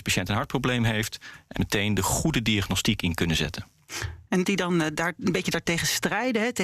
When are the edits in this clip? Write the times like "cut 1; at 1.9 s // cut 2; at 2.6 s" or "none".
cut 1; at 1.6 s // cut 2; at 4.4 s